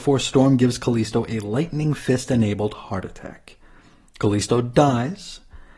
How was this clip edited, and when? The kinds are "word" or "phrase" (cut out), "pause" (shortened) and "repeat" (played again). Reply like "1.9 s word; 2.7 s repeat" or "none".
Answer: none